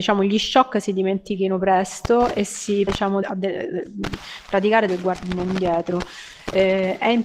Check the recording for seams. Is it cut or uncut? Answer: cut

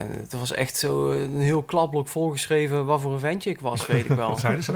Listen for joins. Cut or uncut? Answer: uncut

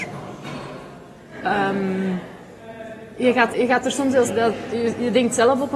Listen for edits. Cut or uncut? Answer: cut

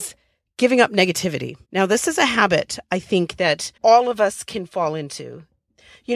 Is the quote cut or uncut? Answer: cut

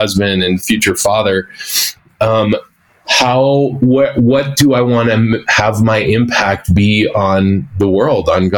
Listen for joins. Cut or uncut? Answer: uncut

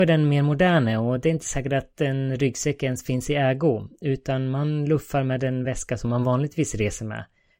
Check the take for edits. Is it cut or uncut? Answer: uncut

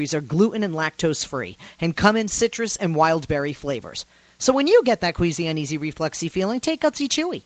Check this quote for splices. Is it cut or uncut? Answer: uncut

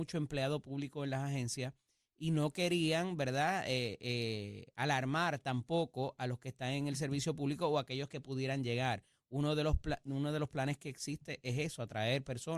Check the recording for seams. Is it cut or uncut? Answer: uncut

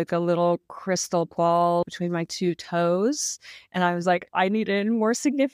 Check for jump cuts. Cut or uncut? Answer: uncut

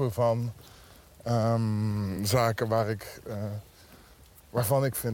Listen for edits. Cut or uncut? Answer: uncut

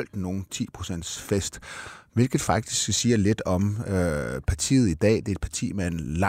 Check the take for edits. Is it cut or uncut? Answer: uncut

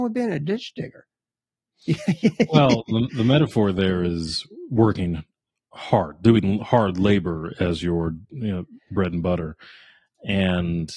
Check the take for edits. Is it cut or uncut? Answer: uncut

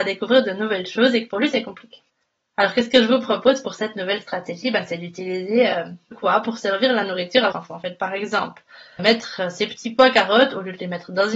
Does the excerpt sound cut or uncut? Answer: cut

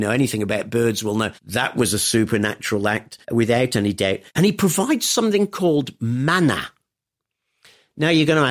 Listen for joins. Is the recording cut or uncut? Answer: cut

